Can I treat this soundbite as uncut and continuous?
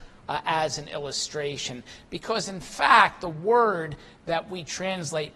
yes; 0 cuts

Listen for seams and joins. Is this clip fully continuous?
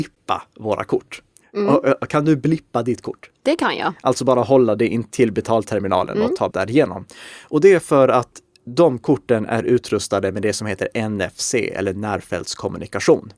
no; 2 cuts; at 1.4 s, 6.5 s

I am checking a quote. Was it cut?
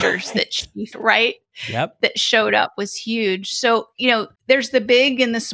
yes; 2 cuts; at 0.9 s, 4.4 s

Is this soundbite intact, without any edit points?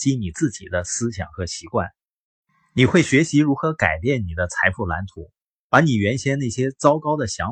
yes; 0 cuts

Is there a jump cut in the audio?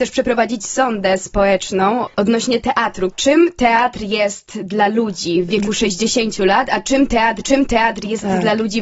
yes; 2 cuts; at 2.1 s, 7.4 s

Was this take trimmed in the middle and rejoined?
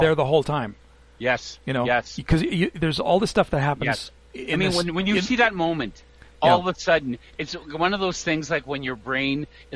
no; 0 cuts

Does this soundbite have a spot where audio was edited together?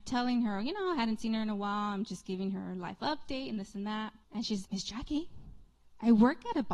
yes; 2 cuts; at 4.2 s, 4.6 s

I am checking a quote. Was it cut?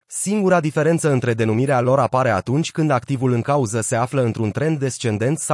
no; 0 cuts

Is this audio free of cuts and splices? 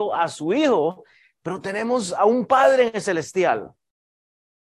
yes; 0 cuts

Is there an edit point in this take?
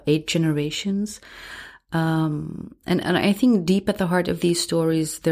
no; 0 cuts

